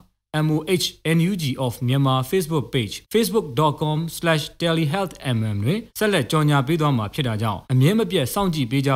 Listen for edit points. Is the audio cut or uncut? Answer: cut